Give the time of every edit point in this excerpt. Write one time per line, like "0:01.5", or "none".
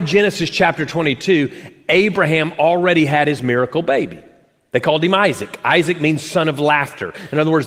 none

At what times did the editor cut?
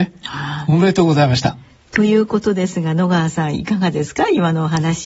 none

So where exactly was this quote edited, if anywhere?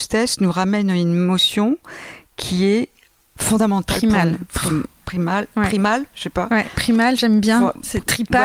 0:06.1

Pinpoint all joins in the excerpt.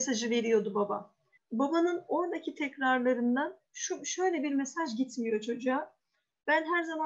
0:01.4

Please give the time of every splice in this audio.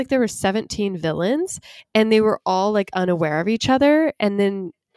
none

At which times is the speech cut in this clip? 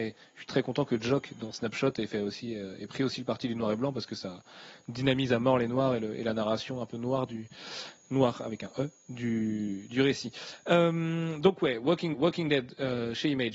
0:12.1

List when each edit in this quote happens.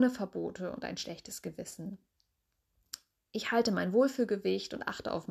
none

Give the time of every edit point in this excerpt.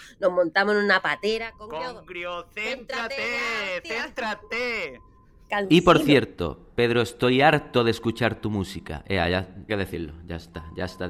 0:09.7

